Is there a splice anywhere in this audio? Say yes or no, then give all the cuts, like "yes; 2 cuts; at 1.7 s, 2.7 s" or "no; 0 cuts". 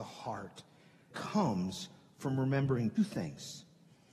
yes; 2 cuts; at 1.1 s, 3.0 s